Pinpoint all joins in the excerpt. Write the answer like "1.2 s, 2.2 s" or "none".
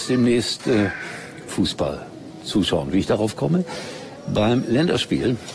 1.5 s